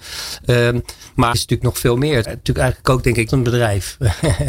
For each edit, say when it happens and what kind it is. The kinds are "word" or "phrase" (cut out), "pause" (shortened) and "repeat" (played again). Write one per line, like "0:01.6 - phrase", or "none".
0:01.3 - word
0:02.2 - phrase
0:03.3 - phrase